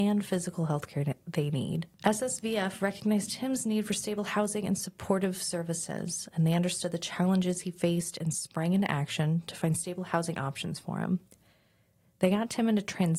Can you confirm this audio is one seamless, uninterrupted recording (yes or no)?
yes